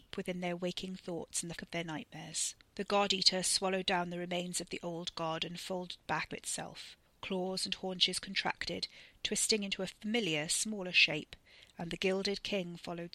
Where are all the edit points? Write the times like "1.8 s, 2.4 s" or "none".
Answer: 1.6 s, 6.3 s